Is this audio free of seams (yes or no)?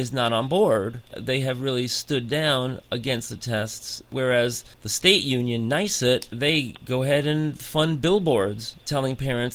yes